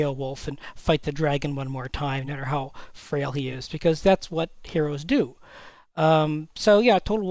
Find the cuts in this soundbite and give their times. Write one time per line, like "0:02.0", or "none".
none

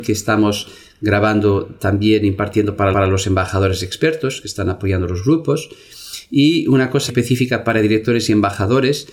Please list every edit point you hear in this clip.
0:02.9
0:07.1

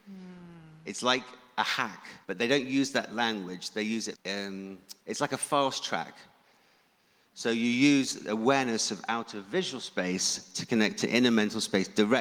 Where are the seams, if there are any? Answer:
0:02.2
0:04.1
0:05.0

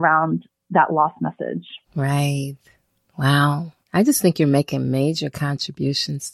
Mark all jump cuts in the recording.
0:01.8
0:03.8

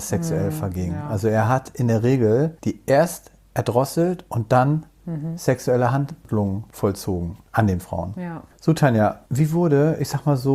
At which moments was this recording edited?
0:02.6
0:08.5
0:09.3

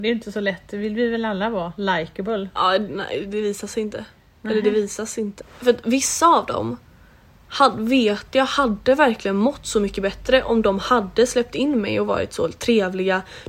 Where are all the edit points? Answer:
none

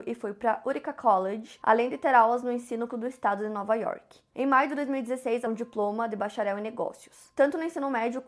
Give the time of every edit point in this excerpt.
0:02.9
0:05.5

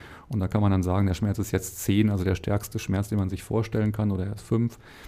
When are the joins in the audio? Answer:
none

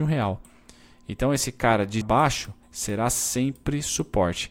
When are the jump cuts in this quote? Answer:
0:02.0
0:02.6

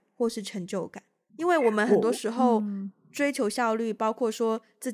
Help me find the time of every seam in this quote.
0:01.3

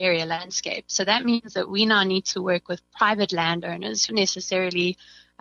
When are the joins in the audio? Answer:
0:04.1

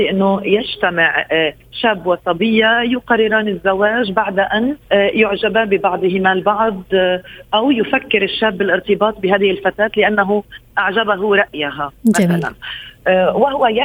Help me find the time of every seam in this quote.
0:04.8

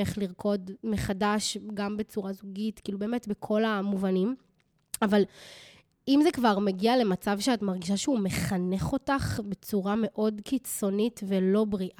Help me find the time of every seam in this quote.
none

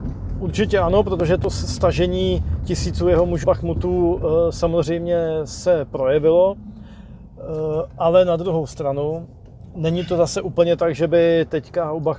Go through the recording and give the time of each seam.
0:03.4

